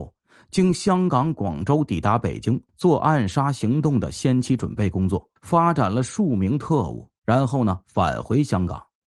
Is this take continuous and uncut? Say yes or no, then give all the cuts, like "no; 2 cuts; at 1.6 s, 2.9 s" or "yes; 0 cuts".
no; 2 cuts; at 2.7 s, 5.4 s